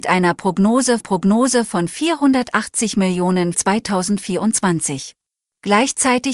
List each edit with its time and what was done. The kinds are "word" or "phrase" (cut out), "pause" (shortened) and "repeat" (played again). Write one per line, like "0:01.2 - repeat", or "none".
0:01.0 - repeat
0:03.5 - word
0:05.4 - pause